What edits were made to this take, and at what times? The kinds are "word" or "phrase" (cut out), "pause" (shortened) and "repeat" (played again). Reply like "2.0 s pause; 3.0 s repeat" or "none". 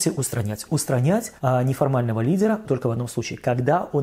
1.4 s pause; 2.6 s word

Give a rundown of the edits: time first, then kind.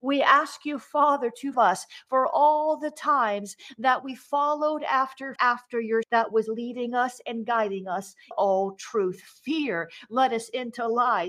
1.5 s word; 5.4 s phrase; 6.0 s word; 8.3 s word

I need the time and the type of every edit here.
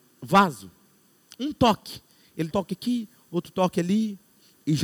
2.5 s word

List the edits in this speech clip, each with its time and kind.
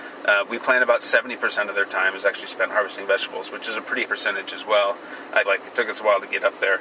4.0 s word; 5.4 s word

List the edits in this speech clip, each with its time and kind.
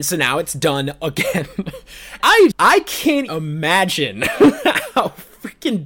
2.2 s word; 2.5 s word; 3.3 s word

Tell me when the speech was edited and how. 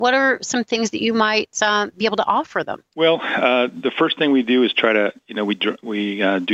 2.9 s pause

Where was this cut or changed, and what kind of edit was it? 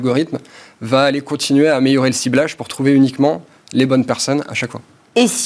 none

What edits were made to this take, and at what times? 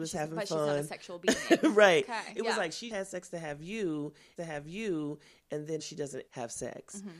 2.9 s word; 4.4 s repeat; 5.8 s word; 6.3 s word

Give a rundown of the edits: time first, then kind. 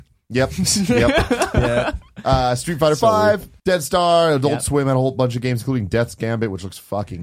3.6 s pause

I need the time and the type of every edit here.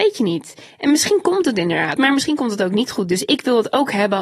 2.0 s word

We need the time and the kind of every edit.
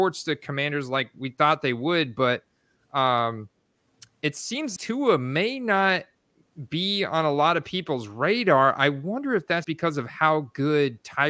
4.8 s word; 9.6 s word

